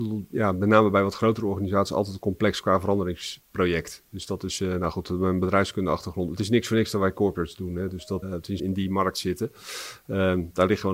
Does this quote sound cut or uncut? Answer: cut